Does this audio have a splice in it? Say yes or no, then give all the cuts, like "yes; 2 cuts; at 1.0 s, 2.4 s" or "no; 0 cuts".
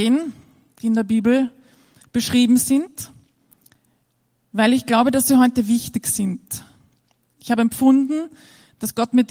no; 0 cuts